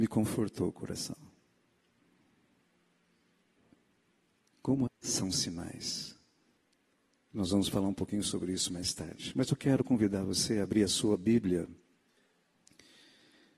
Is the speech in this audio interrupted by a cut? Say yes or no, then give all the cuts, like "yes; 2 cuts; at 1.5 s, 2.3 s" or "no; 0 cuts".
yes; 2 cuts; at 4.9 s, 6.6 s